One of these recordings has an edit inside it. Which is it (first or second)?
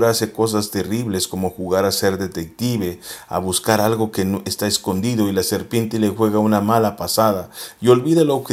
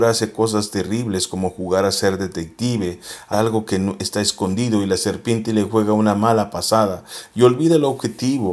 second